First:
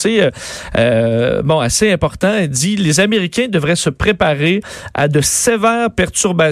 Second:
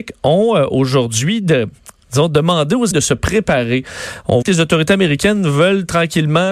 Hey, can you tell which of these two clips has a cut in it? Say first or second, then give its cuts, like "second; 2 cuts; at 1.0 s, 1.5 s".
second; 2 cuts; at 2.9 s, 4.4 s